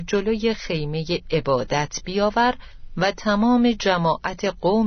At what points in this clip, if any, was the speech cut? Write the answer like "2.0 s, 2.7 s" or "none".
none